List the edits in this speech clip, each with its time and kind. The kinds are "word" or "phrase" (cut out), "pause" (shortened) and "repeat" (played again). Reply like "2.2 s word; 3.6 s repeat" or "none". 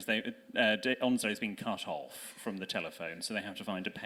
none